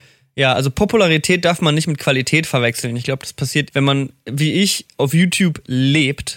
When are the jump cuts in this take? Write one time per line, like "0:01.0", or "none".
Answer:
0:03.7